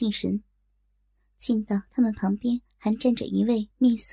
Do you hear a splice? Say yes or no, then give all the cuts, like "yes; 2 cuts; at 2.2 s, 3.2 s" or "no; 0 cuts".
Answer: no; 0 cuts